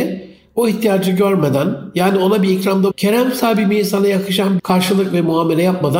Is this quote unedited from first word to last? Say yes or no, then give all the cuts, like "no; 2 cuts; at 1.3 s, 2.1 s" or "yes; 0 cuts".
no; 2 cuts; at 2.9 s, 4.6 s